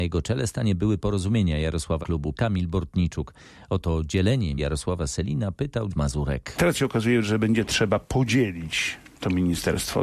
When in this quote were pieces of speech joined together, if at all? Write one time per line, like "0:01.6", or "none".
0:01.0
0:02.0
0:02.3
0:04.6
0:05.9